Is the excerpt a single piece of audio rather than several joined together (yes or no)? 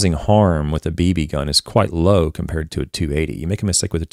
yes